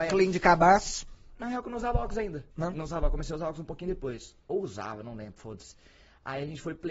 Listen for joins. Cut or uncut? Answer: cut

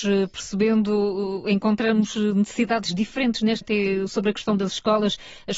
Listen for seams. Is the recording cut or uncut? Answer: cut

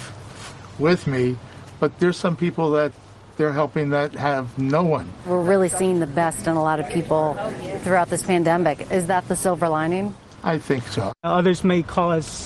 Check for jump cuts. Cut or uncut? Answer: uncut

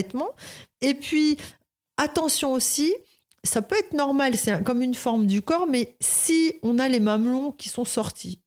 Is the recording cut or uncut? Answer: uncut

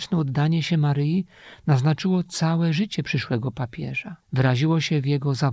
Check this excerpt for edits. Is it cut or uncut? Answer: cut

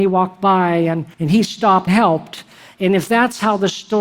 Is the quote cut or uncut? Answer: cut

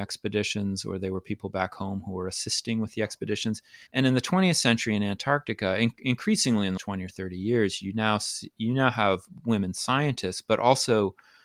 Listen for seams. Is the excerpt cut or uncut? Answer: cut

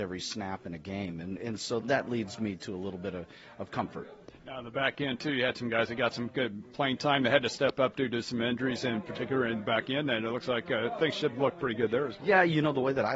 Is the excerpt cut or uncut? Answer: cut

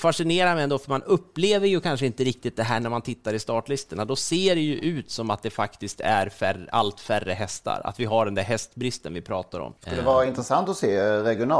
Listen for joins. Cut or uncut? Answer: cut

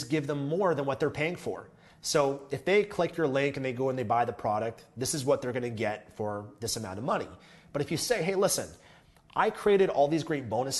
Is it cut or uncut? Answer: uncut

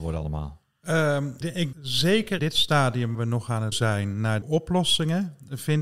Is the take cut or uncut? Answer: cut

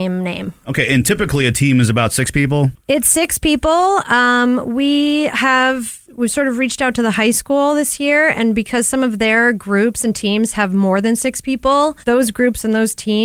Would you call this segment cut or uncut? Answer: cut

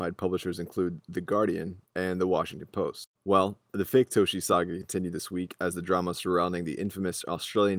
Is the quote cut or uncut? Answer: cut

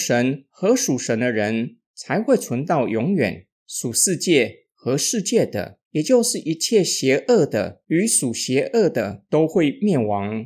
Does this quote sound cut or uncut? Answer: cut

